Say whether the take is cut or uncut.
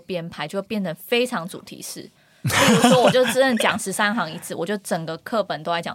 uncut